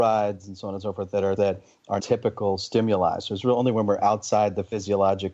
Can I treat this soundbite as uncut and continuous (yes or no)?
no